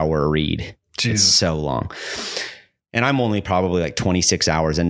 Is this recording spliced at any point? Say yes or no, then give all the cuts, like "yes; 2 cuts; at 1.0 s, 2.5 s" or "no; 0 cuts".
no; 0 cuts